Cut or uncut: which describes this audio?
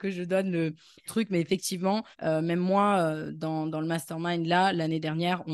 cut